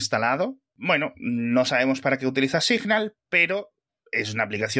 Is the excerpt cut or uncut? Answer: uncut